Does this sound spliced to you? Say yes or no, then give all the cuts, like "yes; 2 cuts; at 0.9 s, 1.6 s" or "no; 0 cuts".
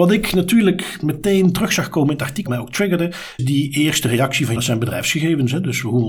yes; 3 cuts; at 2.5 s, 3.4 s, 4.6 s